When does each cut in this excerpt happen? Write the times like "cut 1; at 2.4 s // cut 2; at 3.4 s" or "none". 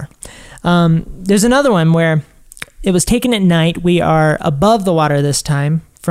none